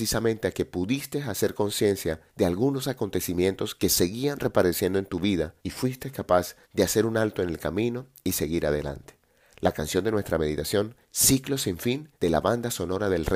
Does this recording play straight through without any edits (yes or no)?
no